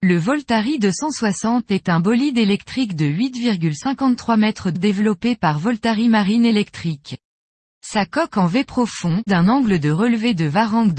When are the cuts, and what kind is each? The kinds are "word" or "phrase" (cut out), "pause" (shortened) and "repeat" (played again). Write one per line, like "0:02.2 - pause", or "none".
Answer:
0:04.7 - word
0:09.3 - word